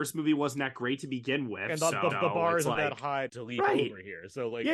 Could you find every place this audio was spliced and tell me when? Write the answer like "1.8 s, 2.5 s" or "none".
2.1 s, 3.3 s

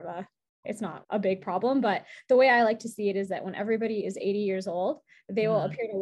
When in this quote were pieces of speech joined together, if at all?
1.0 s

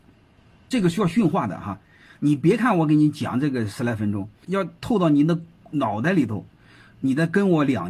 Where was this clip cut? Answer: 4.4 s

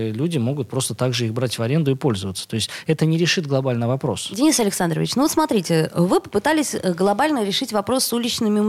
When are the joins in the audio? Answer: none

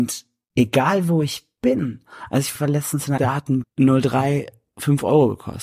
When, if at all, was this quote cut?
2.6 s, 3.2 s, 3.6 s

